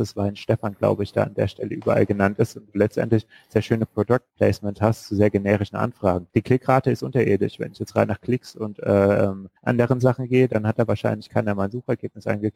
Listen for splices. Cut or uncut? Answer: cut